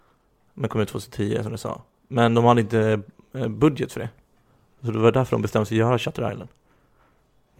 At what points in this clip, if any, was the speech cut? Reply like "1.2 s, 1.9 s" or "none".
none